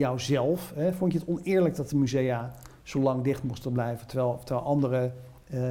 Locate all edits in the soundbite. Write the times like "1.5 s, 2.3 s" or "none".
none

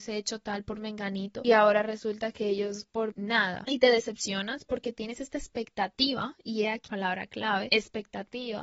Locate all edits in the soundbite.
3.1 s, 6.9 s

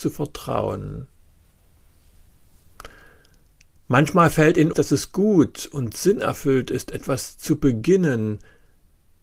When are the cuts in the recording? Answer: 4.7 s

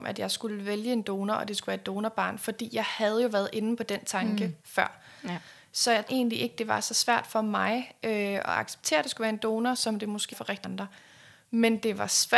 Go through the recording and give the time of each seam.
6.1 s, 10.3 s, 10.6 s

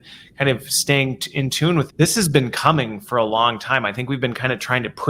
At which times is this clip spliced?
1.9 s

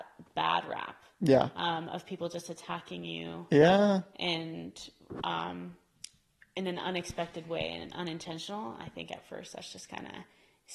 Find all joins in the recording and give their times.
none

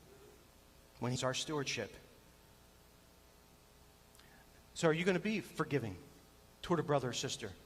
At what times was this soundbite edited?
1.2 s

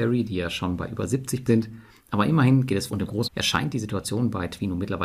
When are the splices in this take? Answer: 1.5 s, 2.9 s, 3.3 s

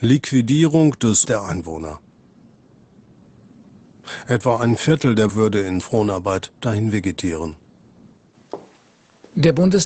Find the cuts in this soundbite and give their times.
1.2 s, 5.3 s, 5.8 s

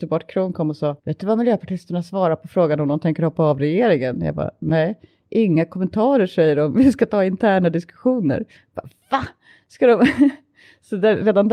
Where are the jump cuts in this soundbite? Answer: 1.0 s

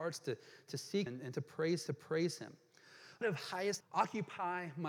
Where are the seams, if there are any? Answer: 1.1 s, 1.9 s, 3.2 s, 3.8 s

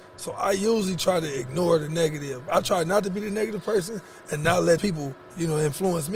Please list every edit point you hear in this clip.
4.8 s

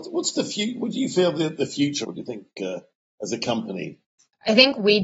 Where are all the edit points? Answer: 2.0 s

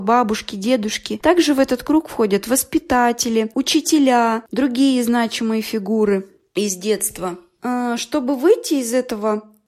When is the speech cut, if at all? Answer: none

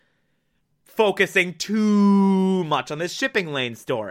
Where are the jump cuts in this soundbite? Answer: none

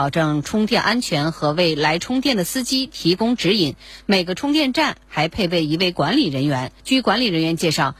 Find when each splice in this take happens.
6.8 s

